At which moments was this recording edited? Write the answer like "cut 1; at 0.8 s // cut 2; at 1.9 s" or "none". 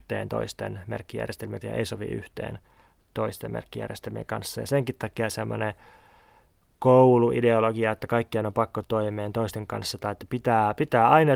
cut 1; at 1.6 s // cut 2; at 8.8 s